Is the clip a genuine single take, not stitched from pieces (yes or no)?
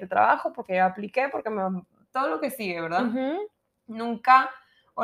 yes